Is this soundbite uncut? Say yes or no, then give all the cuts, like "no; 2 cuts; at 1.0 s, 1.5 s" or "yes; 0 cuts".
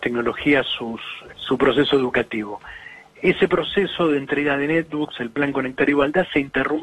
no; 1 cut; at 1.3 s